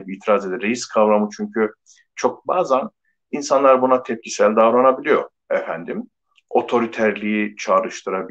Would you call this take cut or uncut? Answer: cut